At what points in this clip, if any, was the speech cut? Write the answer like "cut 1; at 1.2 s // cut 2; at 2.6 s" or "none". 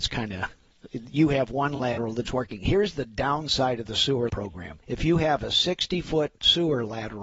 cut 1; at 4.3 s // cut 2; at 4.8 s